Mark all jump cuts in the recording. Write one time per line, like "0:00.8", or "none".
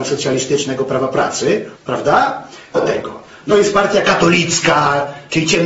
0:01.7
0:02.7
0:03.5